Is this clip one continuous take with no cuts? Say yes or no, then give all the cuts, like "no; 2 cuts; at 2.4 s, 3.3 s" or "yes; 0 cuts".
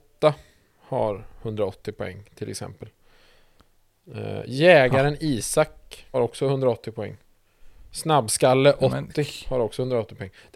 no; 1 cut; at 6.1 s